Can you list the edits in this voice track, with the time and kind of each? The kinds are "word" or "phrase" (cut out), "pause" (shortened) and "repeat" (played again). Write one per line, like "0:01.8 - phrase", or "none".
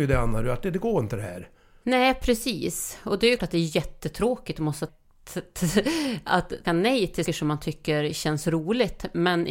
0:03.4 - word
0:04.9 - word
0:06.6 - word
0:07.2 - word